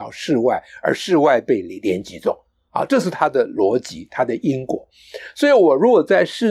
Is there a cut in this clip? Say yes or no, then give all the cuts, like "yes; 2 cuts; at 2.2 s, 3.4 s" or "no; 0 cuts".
no; 0 cuts